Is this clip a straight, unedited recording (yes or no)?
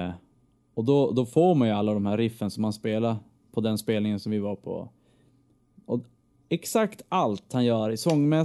yes